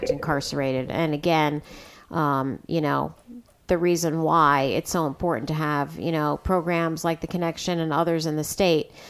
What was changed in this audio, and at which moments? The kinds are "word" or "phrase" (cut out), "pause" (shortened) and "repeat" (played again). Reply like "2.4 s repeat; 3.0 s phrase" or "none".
none